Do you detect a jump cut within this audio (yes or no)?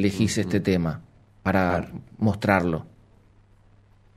yes